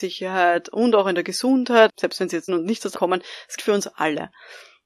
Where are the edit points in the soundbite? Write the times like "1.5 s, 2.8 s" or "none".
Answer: 1.9 s, 2.5 s, 2.9 s, 3.6 s